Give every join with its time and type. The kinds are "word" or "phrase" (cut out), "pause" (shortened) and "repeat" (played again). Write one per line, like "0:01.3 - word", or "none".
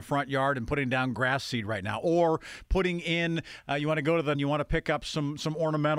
0:04.3 - phrase